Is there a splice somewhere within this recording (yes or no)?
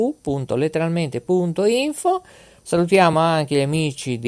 no